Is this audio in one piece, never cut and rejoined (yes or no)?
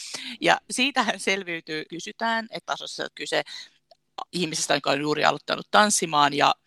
no